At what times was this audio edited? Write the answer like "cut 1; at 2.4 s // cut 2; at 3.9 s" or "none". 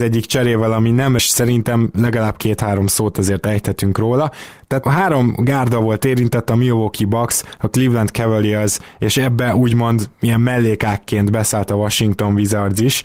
cut 1; at 1.2 s // cut 2; at 4.8 s